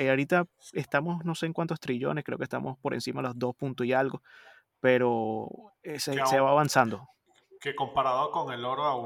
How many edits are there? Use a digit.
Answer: 0